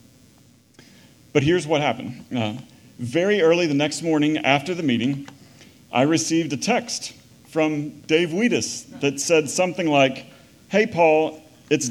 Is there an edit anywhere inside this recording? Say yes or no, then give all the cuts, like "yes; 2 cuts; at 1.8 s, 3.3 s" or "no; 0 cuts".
no; 0 cuts